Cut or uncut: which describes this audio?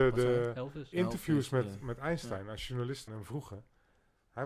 cut